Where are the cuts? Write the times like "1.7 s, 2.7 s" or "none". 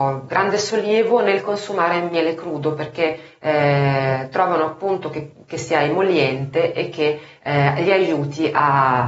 none